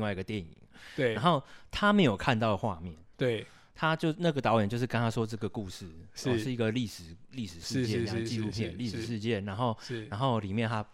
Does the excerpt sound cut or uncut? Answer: uncut